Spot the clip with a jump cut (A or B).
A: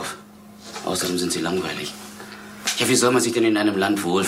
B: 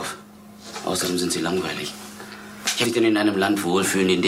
B